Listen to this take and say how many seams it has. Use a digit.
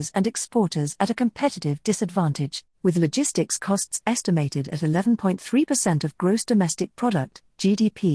1